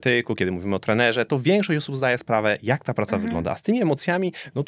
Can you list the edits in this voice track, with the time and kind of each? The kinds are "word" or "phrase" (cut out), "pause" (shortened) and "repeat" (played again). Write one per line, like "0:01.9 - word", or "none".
0:02.2 - word